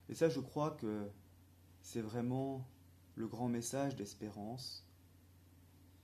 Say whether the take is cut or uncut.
uncut